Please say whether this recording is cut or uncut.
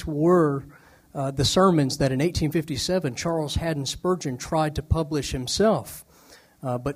uncut